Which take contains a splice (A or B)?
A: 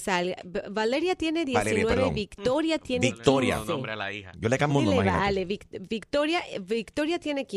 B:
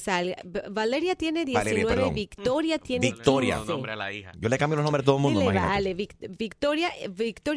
A